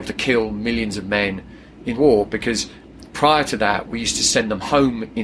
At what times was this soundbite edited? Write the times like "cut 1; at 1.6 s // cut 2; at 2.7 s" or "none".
cut 1; at 1.9 s